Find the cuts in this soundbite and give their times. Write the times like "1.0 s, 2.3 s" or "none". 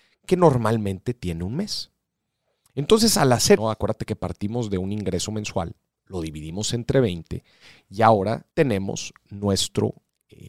3.6 s, 8.5 s

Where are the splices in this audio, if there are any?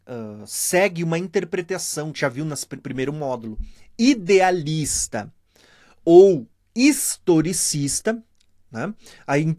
2.1 s, 2.8 s, 6.5 s

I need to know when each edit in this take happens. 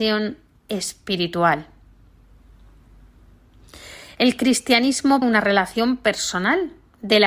5.2 s

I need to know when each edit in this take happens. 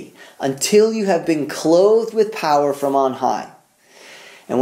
none

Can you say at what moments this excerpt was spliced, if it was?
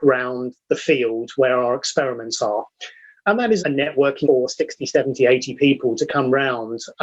3.6 s, 4.2 s

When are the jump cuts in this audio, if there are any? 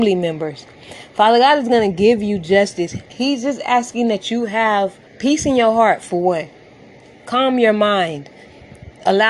5.1 s

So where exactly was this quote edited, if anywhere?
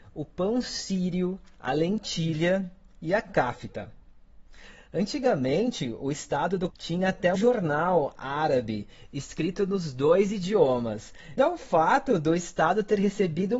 6.7 s, 7.4 s, 11.4 s

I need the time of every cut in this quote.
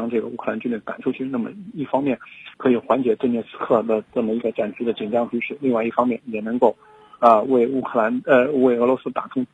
2.5 s

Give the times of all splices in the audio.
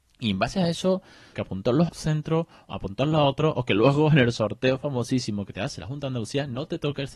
1.3 s, 1.9 s

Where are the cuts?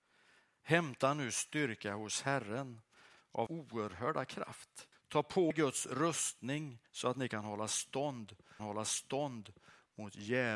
3.5 s, 4.9 s, 5.5 s, 6.9 s, 8.6 s

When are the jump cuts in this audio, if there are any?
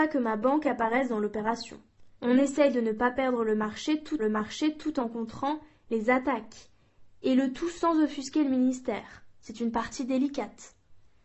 2.1 s, 4.2 s

